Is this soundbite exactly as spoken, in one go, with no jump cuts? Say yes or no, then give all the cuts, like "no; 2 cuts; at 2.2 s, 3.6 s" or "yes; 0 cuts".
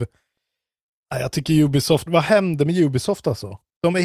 no; 1 cut; at 2.1 s